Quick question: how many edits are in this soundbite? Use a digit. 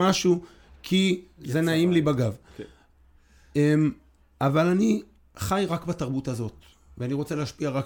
2